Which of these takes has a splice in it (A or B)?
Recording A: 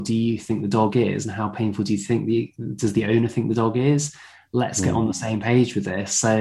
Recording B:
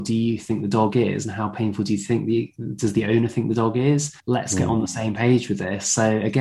B